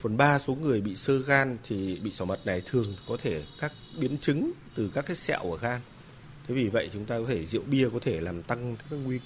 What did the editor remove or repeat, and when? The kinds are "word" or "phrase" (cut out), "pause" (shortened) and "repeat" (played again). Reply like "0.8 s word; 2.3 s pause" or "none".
none